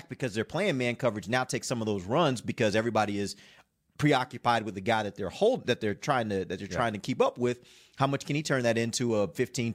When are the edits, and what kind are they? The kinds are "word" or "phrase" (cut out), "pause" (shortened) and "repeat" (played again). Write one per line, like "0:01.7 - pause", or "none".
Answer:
none